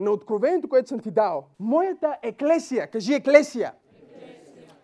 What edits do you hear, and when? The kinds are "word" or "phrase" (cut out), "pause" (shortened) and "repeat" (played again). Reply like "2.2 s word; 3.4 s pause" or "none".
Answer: 1.5 s pause